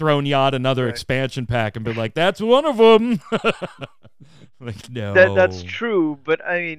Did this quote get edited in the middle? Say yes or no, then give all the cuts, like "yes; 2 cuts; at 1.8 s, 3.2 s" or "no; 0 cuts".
no; 0 cuts